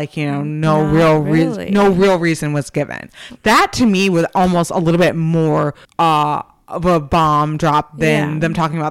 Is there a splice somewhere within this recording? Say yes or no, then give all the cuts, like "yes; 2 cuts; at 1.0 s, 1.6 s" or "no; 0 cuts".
yes; 1 cut; at 5.8 s